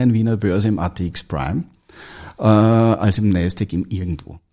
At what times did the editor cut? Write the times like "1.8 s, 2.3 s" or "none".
none